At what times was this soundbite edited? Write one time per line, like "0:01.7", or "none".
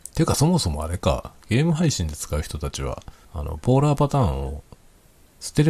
0:03.2